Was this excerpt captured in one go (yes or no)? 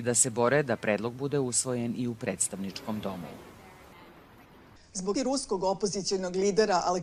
no